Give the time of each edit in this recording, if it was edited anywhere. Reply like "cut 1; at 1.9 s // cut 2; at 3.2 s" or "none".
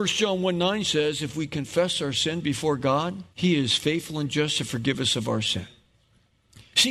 cut 1; at 3.3 s